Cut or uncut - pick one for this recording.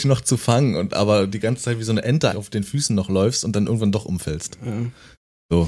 cut